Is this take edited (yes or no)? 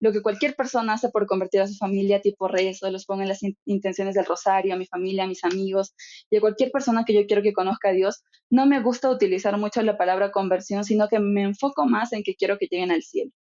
no